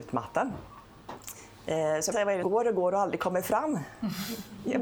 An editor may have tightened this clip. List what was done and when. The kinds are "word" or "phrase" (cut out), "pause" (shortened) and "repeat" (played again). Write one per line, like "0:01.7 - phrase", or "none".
0:02.1 - word
0:02.4 - word